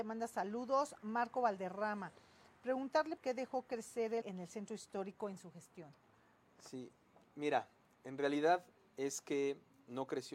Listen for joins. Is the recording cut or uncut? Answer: cut